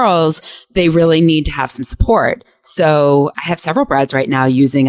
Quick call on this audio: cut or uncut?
uncut